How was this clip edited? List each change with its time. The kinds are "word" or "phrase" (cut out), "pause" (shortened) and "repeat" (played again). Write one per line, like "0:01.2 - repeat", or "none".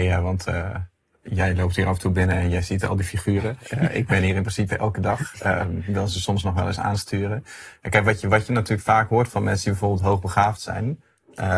none